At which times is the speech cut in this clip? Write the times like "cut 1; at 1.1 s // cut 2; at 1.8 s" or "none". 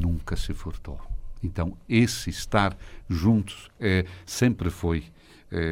none